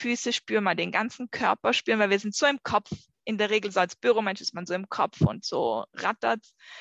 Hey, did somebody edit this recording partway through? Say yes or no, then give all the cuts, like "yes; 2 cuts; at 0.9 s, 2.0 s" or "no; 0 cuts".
no; 0 cuts